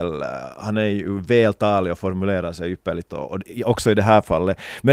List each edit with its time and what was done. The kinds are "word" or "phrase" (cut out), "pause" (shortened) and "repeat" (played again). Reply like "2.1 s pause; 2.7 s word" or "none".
3.1 s phrase

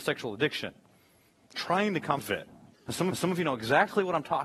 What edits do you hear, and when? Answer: 1.5 s phrase; 2.2 s word; 2.7 s pause; 3.1 s repeat

